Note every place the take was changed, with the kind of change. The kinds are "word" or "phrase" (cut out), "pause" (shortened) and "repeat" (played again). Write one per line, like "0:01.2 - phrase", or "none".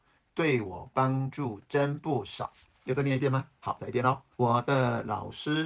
0:02.6 - pause
0:03.6 - pause
0:04.3 - pause